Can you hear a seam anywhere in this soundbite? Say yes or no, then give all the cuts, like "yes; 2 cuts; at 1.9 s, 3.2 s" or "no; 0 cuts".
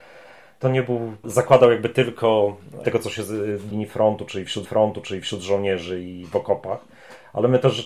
yes; 4 cuts; at 1.2 s, 2.8 s, 3.7 s, 4.6 s